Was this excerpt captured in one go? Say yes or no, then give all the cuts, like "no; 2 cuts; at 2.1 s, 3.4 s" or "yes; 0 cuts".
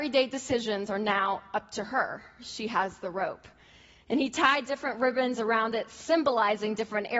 yes; 0 cuts